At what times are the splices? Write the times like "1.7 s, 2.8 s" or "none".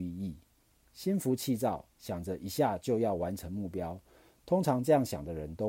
none